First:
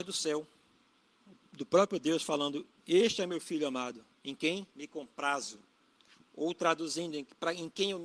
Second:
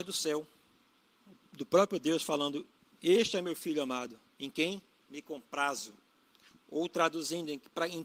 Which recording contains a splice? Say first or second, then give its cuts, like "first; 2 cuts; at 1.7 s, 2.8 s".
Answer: first; 2 cuts; at 2.8 s, 4.7 s